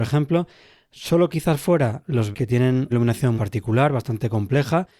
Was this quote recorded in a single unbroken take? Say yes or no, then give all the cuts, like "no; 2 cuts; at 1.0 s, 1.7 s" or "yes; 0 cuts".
no; 4 cuts; at 1.3 s, 2.3 s, 2.9 s, 3.4 s